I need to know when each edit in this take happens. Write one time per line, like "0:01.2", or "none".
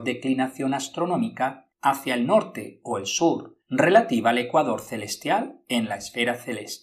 0:01.7
0:03.6